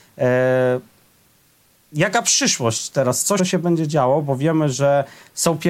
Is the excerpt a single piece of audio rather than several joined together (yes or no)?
no